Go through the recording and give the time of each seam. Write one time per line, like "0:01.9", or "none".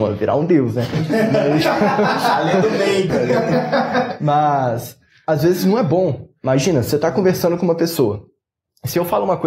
0:03.1